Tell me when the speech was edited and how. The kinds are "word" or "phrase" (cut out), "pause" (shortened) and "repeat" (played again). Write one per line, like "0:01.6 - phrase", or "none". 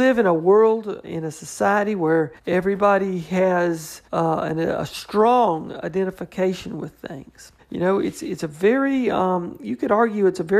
0:01.0 - word
0:02.4 - pause
0:04.0 - pause
0:07.6 - pause